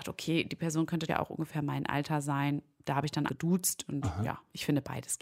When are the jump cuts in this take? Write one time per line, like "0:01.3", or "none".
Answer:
0:01.1
0:03.3